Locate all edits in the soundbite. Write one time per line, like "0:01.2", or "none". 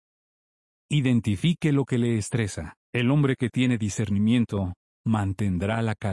0:02.8